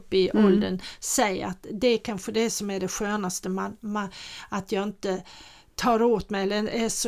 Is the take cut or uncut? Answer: uncut